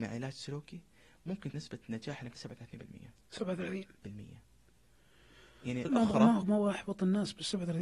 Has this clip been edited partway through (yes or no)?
yes